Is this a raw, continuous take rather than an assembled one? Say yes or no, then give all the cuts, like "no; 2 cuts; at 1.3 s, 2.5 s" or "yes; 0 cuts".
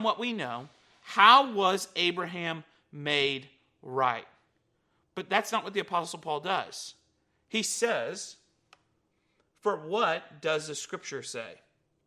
yes; 0 cuts